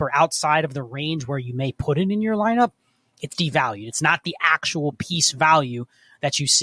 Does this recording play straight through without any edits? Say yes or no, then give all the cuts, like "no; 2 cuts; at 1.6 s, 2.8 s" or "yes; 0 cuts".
yes; 0 cuts